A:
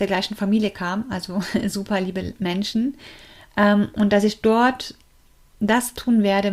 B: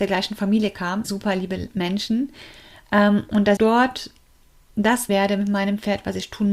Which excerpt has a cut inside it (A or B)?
B